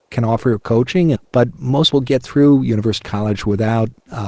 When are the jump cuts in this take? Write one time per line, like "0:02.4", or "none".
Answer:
0:01.1
0:01.9
0:03.0